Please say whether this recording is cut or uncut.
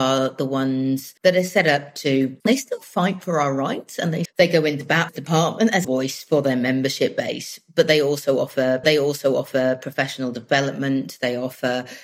cut